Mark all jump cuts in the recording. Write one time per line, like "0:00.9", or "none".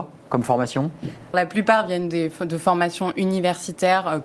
0:01.3